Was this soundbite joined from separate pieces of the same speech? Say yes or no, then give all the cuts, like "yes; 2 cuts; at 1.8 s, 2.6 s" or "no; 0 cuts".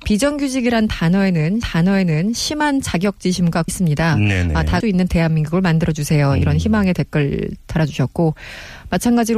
yes; 3 cuts; at 1.6 s, 3.7 s, 4.8 s